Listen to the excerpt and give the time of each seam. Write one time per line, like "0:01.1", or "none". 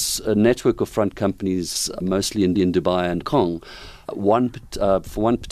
0:02.0
0:02.5
0:03.2
0:04.0